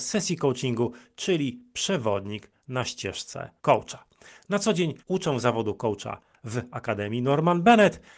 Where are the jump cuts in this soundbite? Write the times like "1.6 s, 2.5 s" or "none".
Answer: 3.6 s, 5.0 s